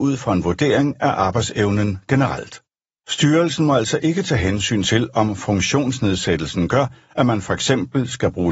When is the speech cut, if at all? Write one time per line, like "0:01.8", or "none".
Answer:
none